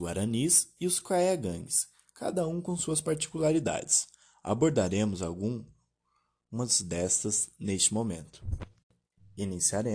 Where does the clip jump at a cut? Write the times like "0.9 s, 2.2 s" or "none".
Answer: none